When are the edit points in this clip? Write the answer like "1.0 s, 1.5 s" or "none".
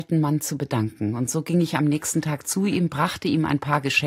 none